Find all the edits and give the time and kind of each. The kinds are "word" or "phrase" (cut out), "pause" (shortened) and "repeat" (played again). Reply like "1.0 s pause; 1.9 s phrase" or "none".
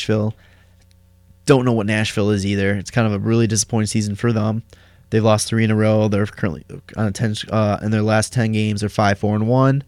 none